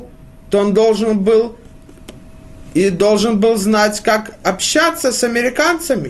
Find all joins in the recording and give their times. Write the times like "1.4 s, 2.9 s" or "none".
none